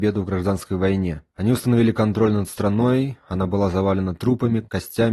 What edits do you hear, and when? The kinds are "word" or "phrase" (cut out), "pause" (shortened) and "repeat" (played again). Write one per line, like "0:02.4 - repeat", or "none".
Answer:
0:01.3 - pause